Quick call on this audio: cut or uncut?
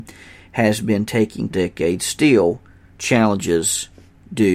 cut